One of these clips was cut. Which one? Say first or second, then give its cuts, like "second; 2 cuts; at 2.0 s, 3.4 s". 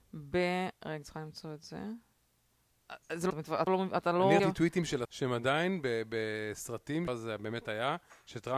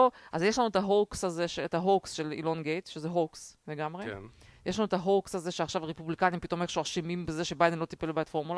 first; 6 cuts; at 1.0 s, 3.3 s, 3.7 s, 4.4 s, 5.0 s, 7.1 s